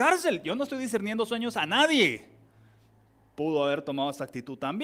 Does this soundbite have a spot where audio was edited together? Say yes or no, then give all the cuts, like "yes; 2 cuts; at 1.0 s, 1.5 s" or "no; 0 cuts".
no; 0 cuts